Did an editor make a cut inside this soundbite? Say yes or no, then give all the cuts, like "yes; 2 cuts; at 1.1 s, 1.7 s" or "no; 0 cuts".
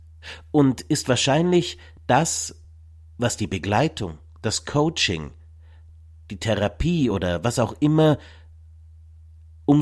no; 0 cuts